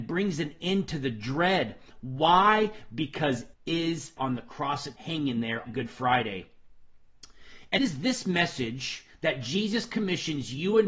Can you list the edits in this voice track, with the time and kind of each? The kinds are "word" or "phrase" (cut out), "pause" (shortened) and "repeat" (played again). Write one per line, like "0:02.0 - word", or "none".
0:03.5 - word
0:04.2 - phrase
0:05.0 - word
0:05.7 - phrase
0:07.8 - word